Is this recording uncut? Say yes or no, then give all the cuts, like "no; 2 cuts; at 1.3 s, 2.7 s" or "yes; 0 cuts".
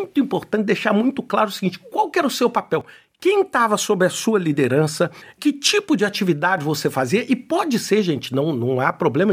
yes; 0 cuts